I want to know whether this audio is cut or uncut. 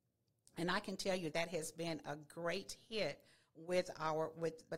cut